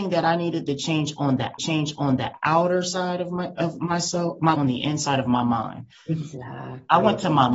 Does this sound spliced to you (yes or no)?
yes